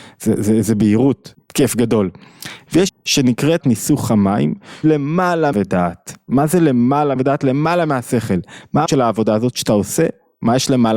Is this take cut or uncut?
cut